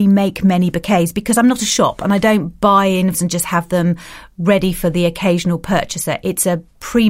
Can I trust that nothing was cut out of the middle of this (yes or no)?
no